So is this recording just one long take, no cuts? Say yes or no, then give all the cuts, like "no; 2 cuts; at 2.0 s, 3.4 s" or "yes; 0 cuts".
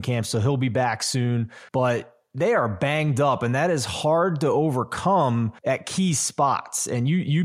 no; 2 cuts; at 1.7 s, 5.6 s